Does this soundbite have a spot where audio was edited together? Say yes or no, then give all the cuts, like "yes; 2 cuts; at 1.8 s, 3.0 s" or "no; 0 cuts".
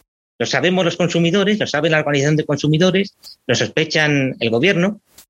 no; 0 cuts